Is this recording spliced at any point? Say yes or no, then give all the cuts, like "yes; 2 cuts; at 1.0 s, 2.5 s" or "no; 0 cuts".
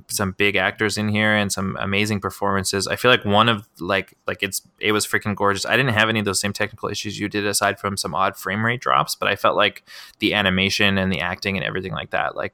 no; 0 cuts